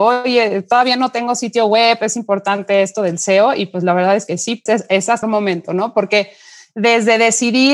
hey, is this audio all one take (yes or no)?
no